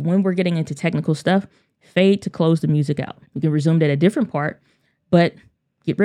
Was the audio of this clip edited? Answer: yes; 1 cut; at 3.3 s

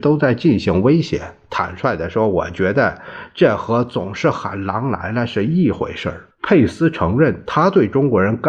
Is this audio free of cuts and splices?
no; 1 cut; at 6.3 s

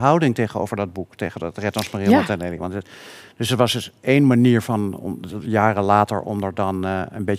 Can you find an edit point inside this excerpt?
no; 0 cuts

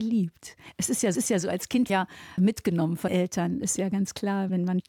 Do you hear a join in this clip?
yes; 5 cuts; at 1.1 s, 1.9 s, 2.4 s, 3.1 s, 3.8 s

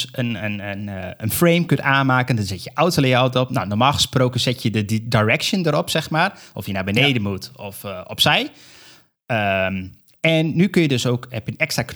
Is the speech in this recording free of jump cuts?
yes; 0 cuts

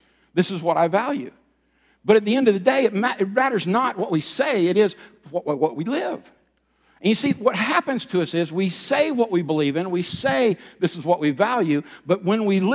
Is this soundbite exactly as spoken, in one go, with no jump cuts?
yes; 0 cuts

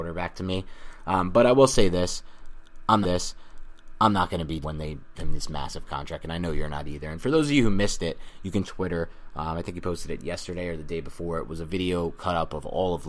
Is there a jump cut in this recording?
yes; 4 cuts; at 3.0 s, 4.6 s, 5.1 s, 8.6 s

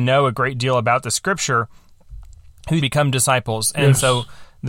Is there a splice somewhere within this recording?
yes; 1 cut; at 2.8 s

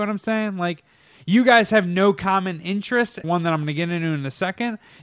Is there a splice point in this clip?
yes; 1 cut; at 3.2 s

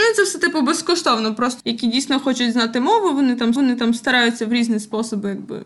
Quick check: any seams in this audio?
yes; 2 cuts; at 1.6 s, 3.6 s

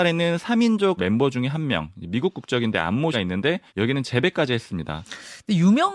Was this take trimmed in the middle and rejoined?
yes; 3 cuts; at 1.0 s, 3.1 s, 3.7 s

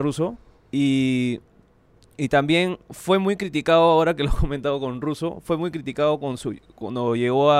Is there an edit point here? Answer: no; 0 cuts

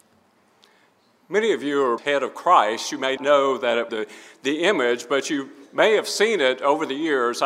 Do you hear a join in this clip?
yes; 3 cuts; at 2.0 s, 3.2 s, 3.9 s

